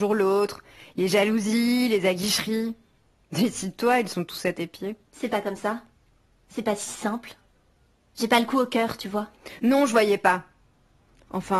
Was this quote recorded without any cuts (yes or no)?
yes